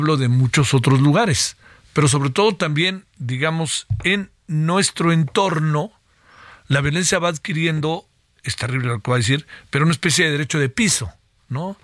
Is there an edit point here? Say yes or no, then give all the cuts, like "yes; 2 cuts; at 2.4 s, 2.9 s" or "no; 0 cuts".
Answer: no; 0 cuts